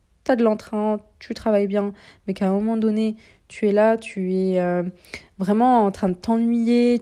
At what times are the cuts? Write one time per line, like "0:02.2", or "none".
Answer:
none